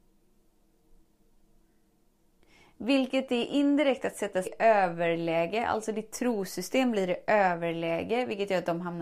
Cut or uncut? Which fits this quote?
cut